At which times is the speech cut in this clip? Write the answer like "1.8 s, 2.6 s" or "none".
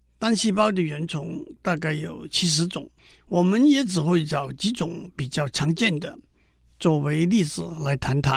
3.0 s